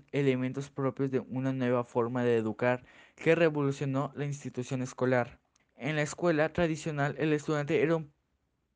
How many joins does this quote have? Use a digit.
1